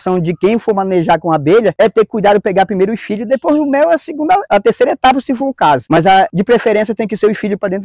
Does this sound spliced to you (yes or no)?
no